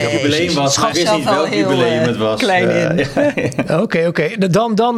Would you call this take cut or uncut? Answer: cut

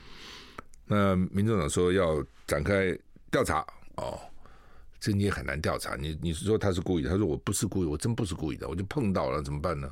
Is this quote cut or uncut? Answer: uncut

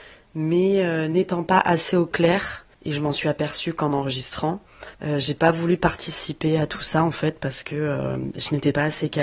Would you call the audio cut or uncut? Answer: cut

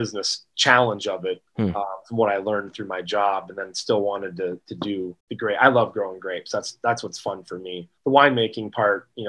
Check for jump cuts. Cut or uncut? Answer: cut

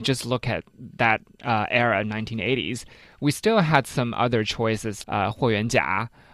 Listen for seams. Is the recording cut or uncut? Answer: cut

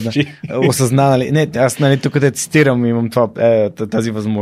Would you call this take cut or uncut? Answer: uncut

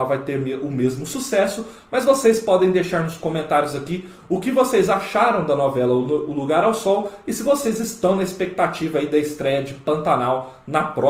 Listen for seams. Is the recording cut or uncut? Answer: uncut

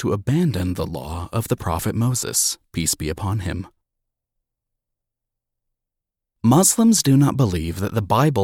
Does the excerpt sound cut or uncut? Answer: uncut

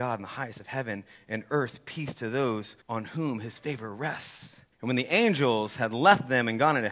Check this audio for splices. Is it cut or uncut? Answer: cut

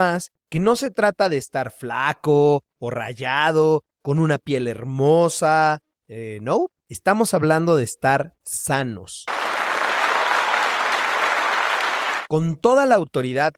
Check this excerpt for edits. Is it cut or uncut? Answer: uncut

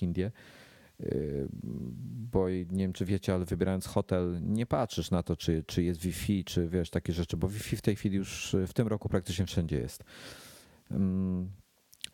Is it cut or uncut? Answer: uncut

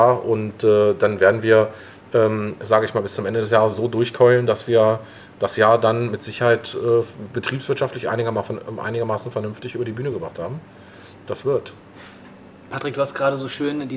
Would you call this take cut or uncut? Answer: uncut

